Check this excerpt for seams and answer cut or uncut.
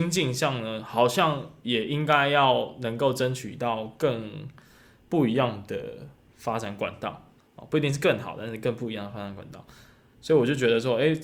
uncut